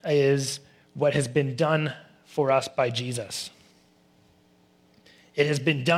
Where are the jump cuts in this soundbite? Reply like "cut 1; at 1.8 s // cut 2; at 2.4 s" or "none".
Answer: none